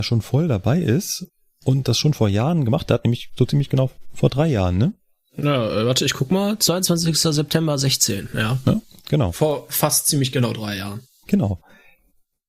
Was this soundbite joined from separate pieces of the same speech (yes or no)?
no